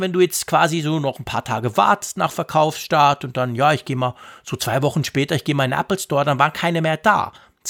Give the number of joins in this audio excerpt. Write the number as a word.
zero